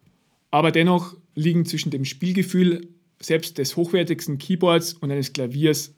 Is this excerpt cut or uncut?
uncut